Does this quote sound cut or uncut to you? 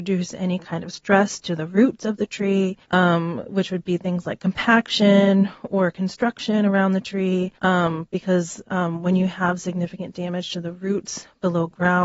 cut